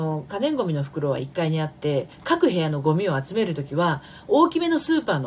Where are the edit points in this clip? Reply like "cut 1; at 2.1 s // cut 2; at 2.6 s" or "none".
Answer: cut 1; at 2.1 s